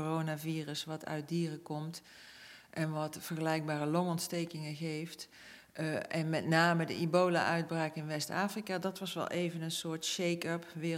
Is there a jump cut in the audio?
no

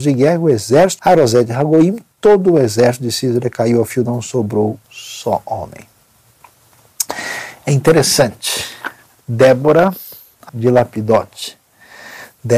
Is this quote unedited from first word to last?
no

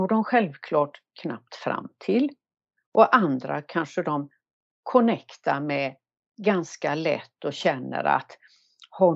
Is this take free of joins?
yes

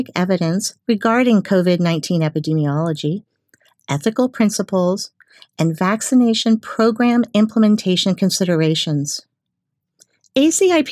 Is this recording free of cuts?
yes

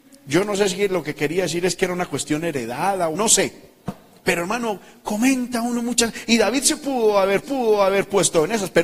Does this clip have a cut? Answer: yes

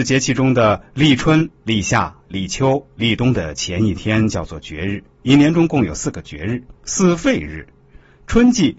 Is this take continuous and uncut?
no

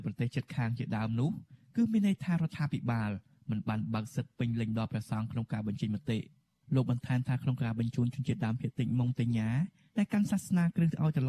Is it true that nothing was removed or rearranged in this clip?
yes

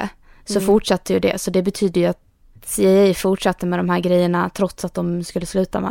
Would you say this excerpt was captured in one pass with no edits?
yes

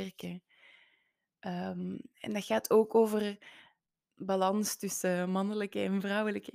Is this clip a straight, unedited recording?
yes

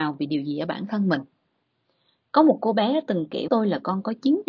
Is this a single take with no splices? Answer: no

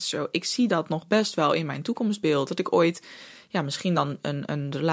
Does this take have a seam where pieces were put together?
no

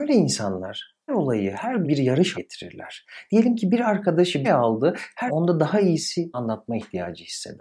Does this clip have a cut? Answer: yes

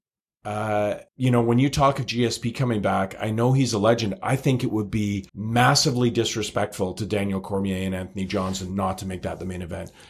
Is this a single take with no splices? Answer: no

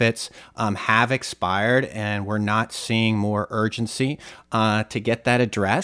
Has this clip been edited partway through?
no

